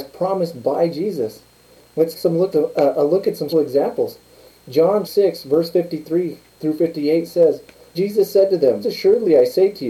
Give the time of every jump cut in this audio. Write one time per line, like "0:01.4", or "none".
0:02.1
0:02.5
0:03.5
0:05.0
0:07.9
0:08.8